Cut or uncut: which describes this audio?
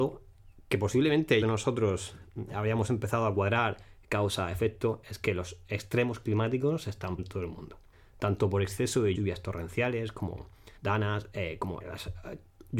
cut